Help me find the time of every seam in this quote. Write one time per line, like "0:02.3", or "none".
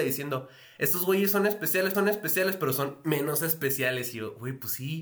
0:01.9